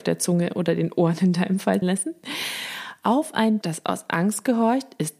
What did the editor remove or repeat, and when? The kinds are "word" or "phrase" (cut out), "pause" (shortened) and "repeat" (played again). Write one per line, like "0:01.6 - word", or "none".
0:01.8 - word
0:03.6 - word